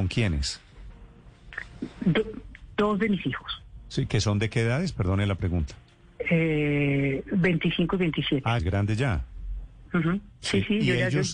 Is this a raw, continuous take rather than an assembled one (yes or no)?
no